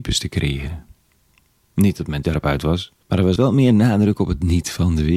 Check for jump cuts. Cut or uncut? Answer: cut